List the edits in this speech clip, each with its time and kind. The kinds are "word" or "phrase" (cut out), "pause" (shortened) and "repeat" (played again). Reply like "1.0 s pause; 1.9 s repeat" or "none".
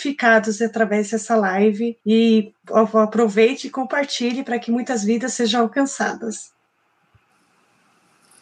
2.0 s pause

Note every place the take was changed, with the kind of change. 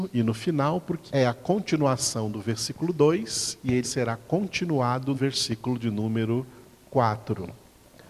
1.1 s word; 3.8 s word; 5.1 s word

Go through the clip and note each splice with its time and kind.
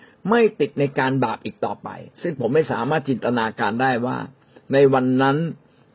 2.1 s pause

